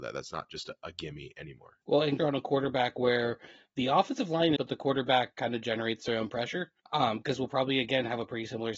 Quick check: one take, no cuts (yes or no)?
no